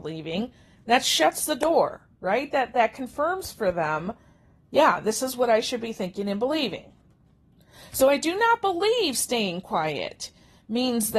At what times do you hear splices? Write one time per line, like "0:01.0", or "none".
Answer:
none